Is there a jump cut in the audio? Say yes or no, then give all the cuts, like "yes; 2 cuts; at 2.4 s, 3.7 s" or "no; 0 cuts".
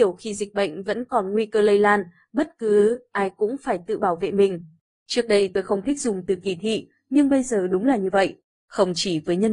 no; 0 cuts